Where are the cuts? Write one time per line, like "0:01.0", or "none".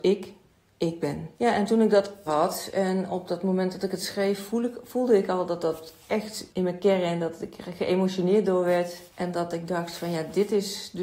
0:01.3
0:02.3
0:06.5